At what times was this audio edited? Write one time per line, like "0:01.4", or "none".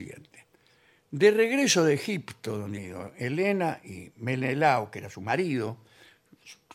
0:02.8